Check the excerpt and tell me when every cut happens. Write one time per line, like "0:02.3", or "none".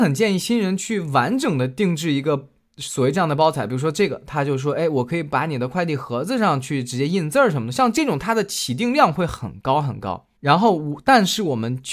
0:10.4